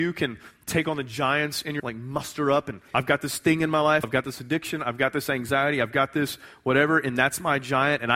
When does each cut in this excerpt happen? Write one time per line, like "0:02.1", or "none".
0:01.8
0:02.9
0:04.0